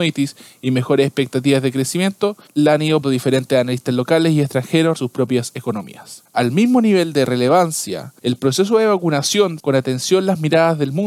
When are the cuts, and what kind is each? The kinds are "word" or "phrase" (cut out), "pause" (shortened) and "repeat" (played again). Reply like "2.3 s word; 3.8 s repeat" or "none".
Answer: 3.0 s word; 5.0 s phrase; 9.6 s word